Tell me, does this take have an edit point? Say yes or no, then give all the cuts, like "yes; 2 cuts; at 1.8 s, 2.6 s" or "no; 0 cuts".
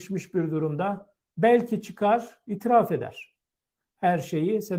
no; 0 cuts